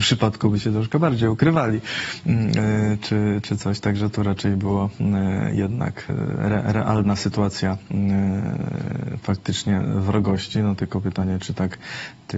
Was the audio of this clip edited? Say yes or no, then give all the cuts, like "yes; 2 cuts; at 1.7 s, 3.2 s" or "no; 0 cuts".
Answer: no; 0 cuts